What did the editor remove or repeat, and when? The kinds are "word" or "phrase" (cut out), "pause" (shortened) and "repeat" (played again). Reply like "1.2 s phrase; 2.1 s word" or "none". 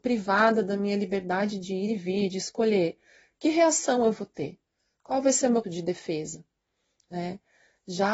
5.6 s word